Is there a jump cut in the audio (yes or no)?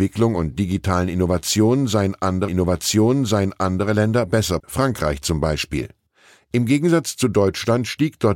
yes